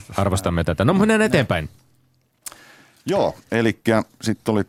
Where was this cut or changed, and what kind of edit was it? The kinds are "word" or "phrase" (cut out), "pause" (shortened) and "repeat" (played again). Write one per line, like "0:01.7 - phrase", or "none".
none